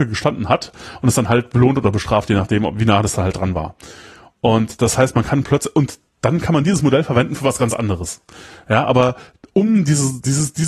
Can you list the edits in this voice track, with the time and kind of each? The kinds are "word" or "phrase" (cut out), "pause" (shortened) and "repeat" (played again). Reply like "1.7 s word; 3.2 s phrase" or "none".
none